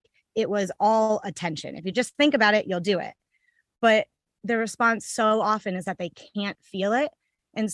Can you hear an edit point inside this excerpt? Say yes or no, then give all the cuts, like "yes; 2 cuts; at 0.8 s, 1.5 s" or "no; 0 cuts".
no; 0 cuts